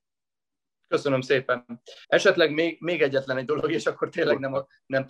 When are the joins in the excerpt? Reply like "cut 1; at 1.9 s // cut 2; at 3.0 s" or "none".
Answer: cut 1; at 2.0 s